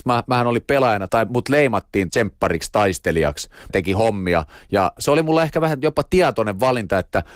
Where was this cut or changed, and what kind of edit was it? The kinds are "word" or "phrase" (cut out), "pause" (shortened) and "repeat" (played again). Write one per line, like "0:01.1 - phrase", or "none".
0:01.1 - word
0:02.1 - word
0:03.7 - word
0:05.0 - word